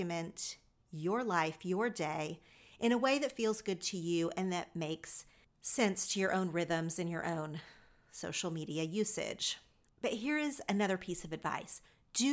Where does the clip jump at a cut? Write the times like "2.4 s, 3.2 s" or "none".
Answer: none